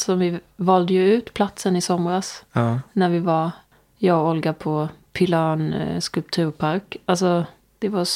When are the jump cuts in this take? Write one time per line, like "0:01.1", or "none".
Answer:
none